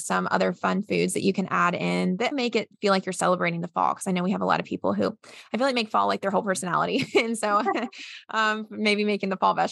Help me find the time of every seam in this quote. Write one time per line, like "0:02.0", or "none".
0:02.3
0:02.7